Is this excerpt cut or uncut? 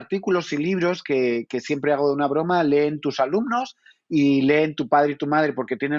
uncut